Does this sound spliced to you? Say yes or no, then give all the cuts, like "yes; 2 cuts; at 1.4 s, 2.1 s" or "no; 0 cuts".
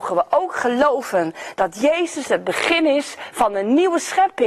no; 0 cuts